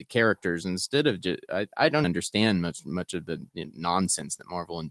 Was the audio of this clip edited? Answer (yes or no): yes